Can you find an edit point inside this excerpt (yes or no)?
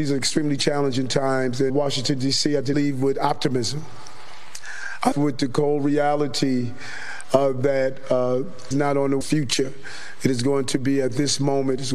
yes